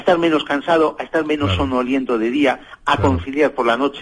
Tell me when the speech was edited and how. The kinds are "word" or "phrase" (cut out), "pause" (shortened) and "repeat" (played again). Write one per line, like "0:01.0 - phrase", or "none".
none